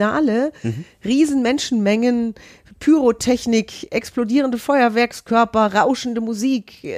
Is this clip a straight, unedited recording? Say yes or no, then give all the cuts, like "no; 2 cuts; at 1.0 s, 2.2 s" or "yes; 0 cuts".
no; 1 cut; at 3.9 s